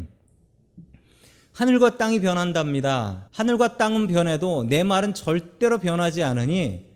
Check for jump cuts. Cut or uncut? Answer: cut